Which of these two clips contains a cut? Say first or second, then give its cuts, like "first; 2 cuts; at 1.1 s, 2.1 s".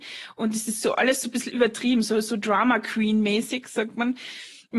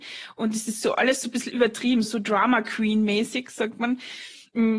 second; 1 cut; at 2.0 s